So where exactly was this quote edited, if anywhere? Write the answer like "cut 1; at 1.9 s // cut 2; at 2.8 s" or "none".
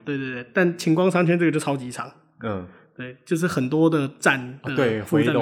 none